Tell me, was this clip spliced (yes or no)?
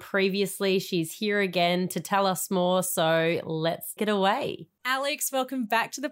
yes